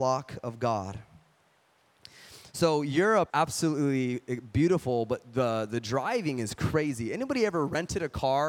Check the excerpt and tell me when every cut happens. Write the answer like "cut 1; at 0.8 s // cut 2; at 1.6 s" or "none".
cut 1; at 3.3 s